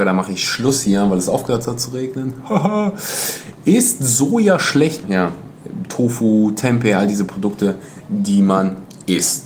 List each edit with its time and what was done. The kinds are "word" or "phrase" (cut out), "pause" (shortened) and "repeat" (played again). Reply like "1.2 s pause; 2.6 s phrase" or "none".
5.0 s word